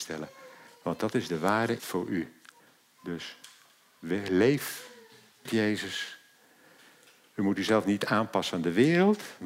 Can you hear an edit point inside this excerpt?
yes; 3 cuts; at 1.8 s, 2.6 s, 5.4 s

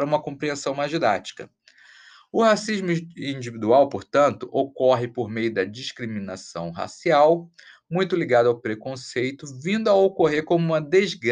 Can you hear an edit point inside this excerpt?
no; 0 cuts

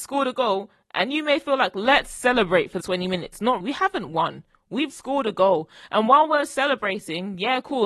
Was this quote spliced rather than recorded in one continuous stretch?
yes; 3 cuts; at 2.8 s, 3.6 s, 4.9 s

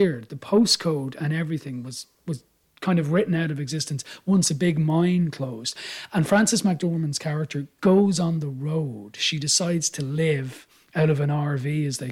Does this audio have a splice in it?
no; 0 cuts

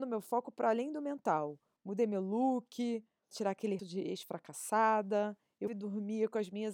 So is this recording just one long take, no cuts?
no; 3 cuts; at 3.3 s, 3.8 s, 5.7 s

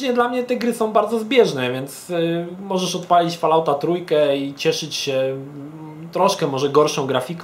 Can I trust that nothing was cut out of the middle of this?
yes; 0 cuts

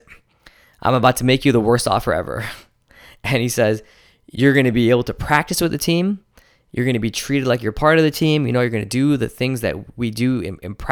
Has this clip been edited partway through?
no; 0 cuts

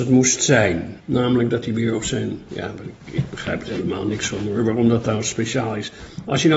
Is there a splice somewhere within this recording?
yes; 1 cut; at 1.0 s

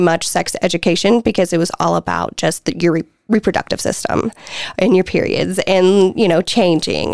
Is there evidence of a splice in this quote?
no; 0 cuts

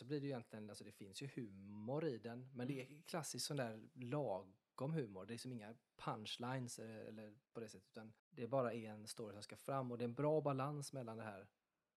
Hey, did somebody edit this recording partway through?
yes; 2 cuts; at 7.5 s, 8.2 s

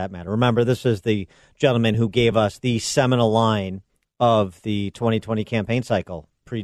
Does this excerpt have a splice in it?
no; 0 cuts

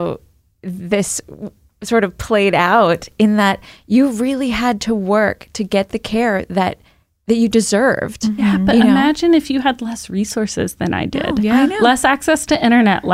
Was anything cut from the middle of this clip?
no; 0 cuts

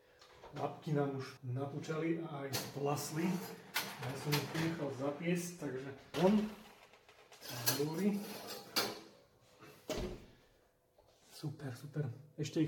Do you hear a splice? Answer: yes; 3 cuts; at 1.4 s, 4.5 s, 6.1 s

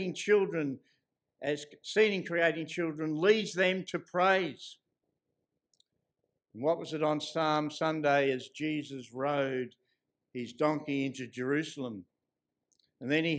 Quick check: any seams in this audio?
no; 0 cuts

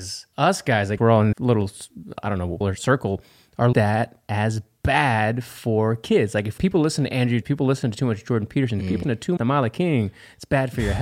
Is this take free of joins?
no; 8 cuts; at 1.0 s, 1.3 s, 2.6 s, 3.7 s, 6.6 s, 7.4 s, 9.0 s, 9.4 s

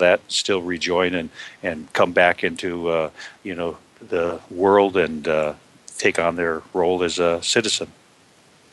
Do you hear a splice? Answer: no; 0 cuts

